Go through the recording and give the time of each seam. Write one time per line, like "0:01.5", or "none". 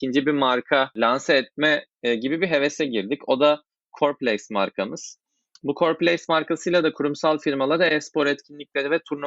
none